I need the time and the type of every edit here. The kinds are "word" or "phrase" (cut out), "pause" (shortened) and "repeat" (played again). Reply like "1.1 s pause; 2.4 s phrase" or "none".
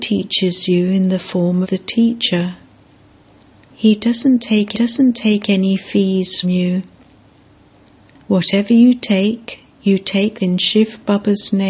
1.6 s word; 4.7 s repeat; 6.4 s word; 10.4 s word